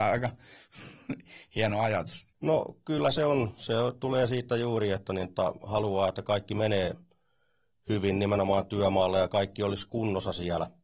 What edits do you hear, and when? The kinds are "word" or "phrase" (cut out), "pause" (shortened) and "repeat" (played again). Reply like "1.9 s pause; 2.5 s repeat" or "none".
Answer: 2.3 s pause